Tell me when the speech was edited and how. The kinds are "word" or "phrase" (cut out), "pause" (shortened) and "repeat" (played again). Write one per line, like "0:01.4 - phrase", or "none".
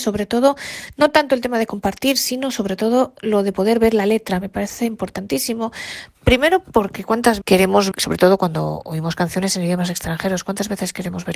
0:06.1 - pause
0:07.4 - word
0:07.9 - word